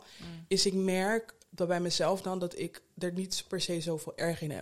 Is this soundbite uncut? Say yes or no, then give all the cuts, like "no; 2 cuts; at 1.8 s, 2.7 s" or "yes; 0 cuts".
yes; 0 cuts